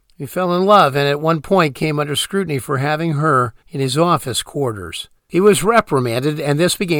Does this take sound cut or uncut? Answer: cut